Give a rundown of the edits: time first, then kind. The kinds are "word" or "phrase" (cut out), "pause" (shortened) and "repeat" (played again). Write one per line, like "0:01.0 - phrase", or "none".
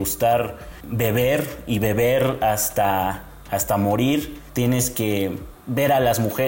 none